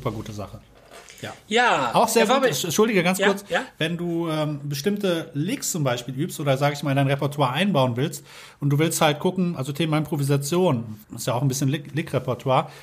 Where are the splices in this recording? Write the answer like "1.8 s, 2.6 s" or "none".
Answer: 11.0 s